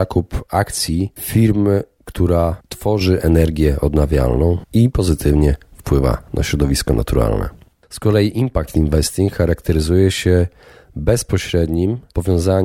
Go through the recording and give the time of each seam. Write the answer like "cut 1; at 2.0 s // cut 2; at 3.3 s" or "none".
cut 1; at 2.6 s